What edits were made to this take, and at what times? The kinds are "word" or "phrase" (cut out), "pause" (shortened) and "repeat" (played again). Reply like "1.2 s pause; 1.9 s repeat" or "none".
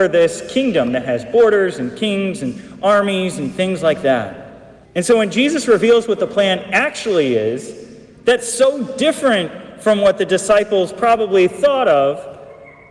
4.9 s pause